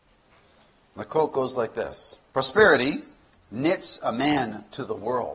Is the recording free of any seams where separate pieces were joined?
no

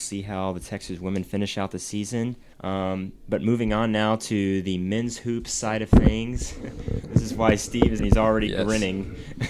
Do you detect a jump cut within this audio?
yes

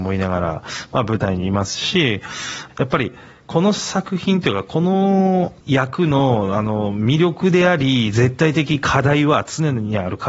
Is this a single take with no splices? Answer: no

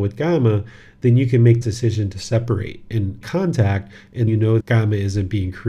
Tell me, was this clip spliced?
yes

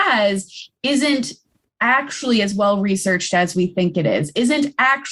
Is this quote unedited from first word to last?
yes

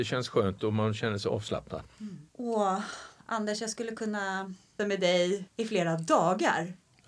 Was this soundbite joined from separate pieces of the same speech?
yes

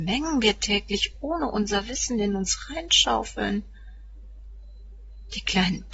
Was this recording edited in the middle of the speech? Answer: no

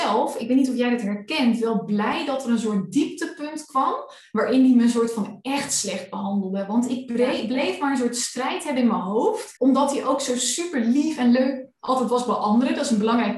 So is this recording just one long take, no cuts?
no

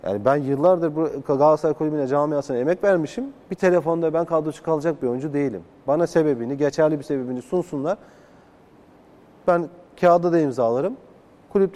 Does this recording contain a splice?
no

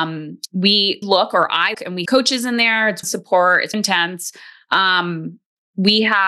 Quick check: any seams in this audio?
yes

